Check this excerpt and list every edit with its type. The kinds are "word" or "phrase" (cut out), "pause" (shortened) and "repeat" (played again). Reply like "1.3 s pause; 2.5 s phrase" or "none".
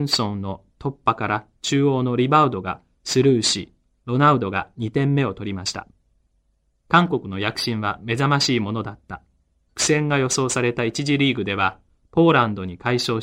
none